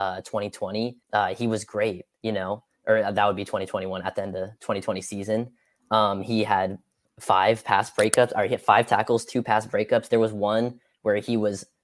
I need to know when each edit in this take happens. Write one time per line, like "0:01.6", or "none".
0:01.0
0:02.1
0:07.0